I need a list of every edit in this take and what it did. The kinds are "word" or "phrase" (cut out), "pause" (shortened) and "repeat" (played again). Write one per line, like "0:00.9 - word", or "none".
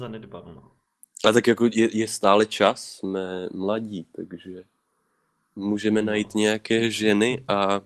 none